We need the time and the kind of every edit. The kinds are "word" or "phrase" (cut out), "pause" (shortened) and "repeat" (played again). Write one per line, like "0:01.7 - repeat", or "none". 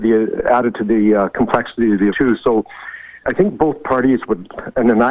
0:02.1 - word
0:03.2 - word